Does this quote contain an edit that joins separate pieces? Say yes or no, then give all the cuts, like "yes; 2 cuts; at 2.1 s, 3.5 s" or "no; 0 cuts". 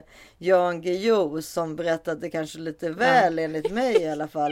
no; 0 cuts